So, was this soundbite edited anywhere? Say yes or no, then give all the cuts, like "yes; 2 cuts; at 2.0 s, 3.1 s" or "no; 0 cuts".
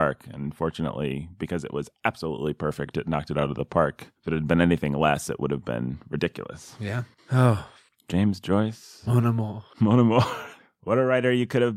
no; 0 cuts